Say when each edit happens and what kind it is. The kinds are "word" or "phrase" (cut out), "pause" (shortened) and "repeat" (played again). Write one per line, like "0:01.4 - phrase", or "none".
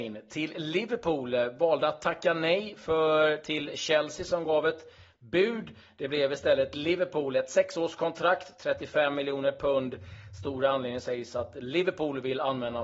none